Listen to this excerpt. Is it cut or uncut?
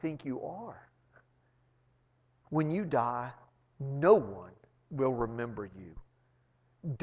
uncut